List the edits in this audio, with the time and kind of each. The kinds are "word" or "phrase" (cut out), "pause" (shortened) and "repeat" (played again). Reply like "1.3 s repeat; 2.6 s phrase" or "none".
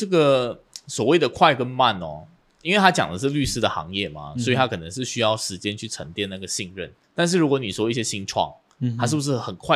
7.0 s pause